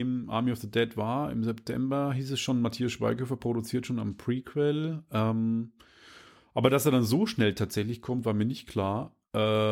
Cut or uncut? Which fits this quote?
uncut